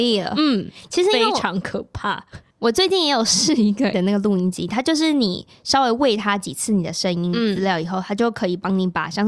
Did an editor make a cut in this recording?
yes; 1 cut; at 3.9 s

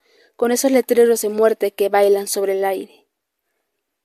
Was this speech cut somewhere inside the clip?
no; 0 cuts

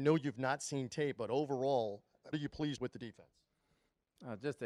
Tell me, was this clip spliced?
yes; 2 cuts; at 2.3 s, 2.8 s

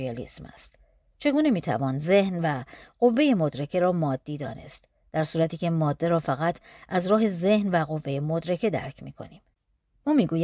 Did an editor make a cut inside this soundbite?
no; 0 cuts

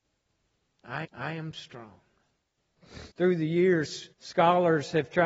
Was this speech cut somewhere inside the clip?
yes; 3 cuts; at 1.0 s, 3.1 s, 4.1 s

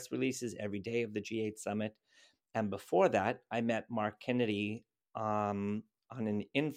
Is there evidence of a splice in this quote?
no; 0 cuts

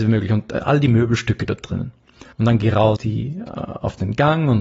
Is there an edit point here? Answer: yes; 2 cuts; at 2.3 s, 3.0 s

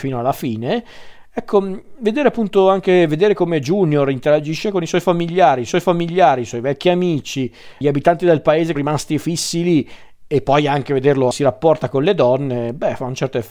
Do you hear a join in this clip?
yes; 4 cuts; at 5.7 s, 7.8 s, 8.7 s, 11.3 s

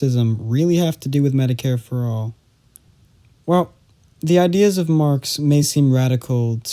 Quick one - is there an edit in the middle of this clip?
no; 0 cuts

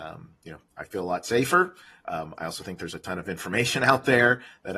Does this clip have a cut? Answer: no; 0 cuts

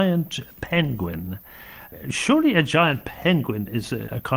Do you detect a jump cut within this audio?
no; 0 cuts

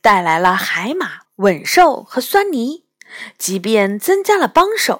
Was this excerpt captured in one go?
no; 1 cut; at 1.3 s

